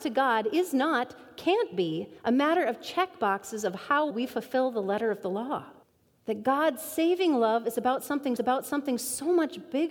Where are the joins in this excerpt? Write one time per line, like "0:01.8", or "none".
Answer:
0:02.2
0:04.1
0:05.8
0:08.4